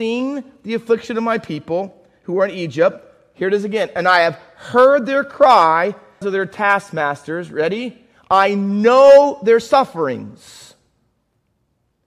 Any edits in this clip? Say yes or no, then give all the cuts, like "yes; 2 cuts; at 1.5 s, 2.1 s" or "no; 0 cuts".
yes; 1 cut; at 6.2 s